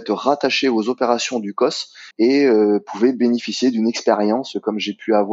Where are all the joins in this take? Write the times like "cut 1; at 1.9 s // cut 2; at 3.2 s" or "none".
cut 1; at 2.1 s